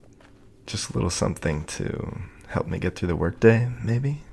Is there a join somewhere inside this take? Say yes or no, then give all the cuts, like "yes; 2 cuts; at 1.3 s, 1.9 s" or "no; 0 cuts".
no; 0 cuts